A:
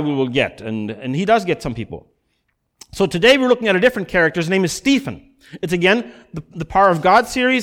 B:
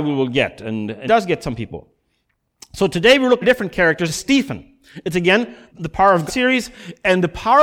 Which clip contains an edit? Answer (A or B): B